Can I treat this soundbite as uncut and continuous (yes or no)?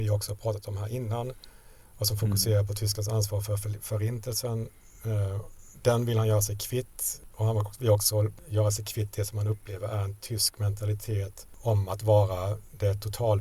yes